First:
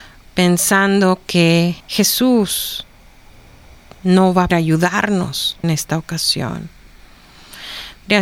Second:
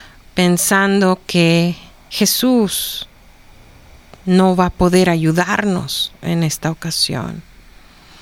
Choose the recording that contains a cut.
first; 3 cuts; at 1.8 s, 4.5 s, 5.6 s

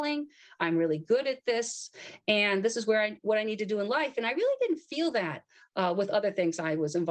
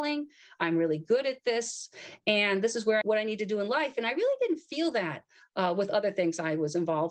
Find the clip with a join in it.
second; 1 cut; at 3.0 s

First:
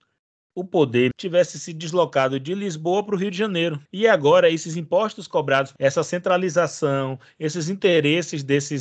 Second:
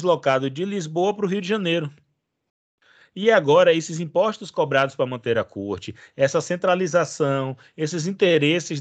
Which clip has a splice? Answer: first; 3 cuts; at 1.1 s, 3.9 s, 5.8 s

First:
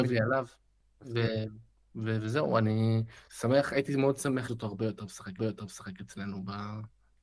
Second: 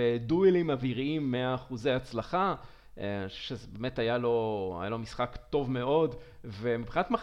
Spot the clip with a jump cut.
first; 3 cuts; at 3.3 s, 4.5 s, 5.4 s

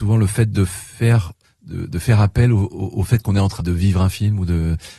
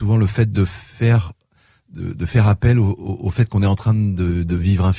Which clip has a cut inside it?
first; 2 cuts; at 1.4 s, 3.6 s

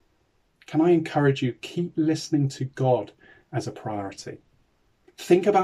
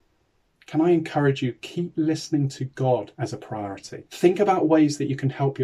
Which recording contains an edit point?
second; 2 cuts; at 3.1 s, 4.1 s

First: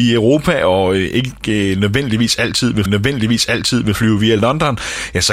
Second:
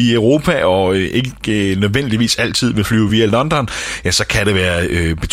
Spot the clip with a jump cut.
first; 1 cut; at 2.9 s

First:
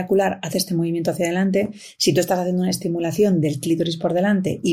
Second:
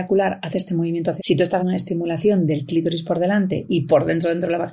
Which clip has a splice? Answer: second; 2 cuts; at 1.2 s, 1.6 s

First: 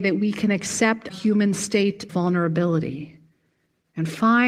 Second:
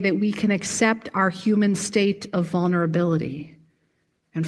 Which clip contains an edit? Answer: first; 2 cuts; at 1.1 s, 2.1 s

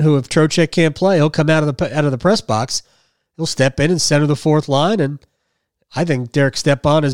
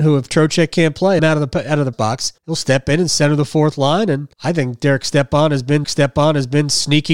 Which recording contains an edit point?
second; 5 cuts; at 1.2 s, 1.9 s, 2.4 s, 4.3 s, 5.8 s

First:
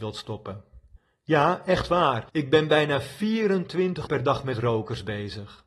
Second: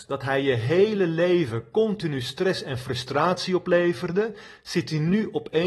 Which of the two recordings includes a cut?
first; 3 cuts; at 1.0 s, 2.3 s, 4.1 s

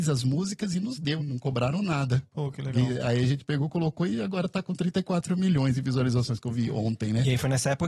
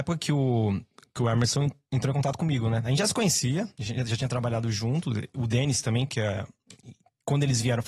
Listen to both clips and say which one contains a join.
first; 1 cut; at 1.2 s

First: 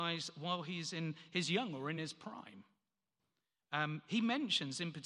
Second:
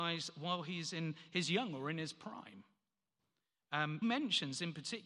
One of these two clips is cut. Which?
second; 1 cut; at 4.0 s

